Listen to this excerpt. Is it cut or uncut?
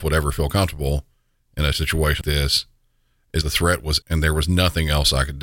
cut